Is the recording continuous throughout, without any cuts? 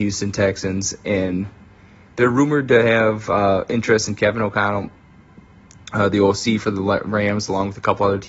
yes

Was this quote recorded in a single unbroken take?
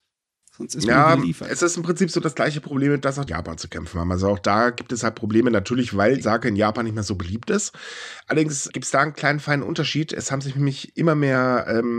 no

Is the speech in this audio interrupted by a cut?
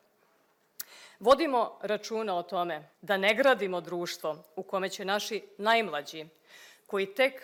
yes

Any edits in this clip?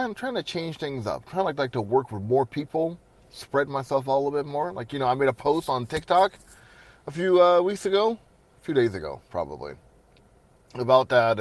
no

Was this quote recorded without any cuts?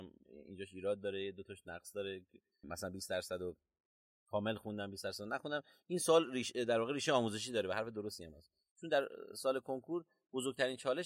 yes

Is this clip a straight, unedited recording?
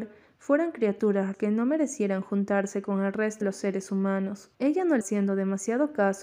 no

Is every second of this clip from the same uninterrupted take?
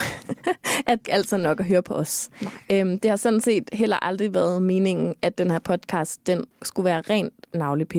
no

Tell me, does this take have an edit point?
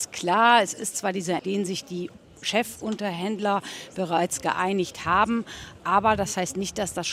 yes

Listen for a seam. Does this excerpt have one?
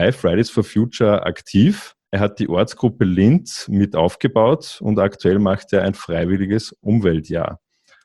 yes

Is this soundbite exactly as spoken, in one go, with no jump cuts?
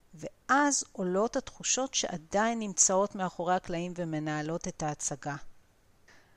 yes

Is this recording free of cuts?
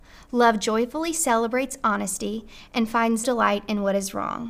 no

